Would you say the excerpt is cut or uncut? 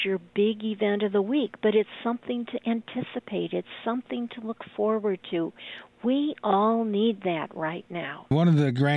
uncut